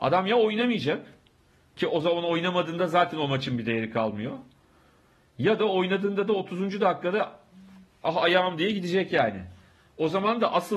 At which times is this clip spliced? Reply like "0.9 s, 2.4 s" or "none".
none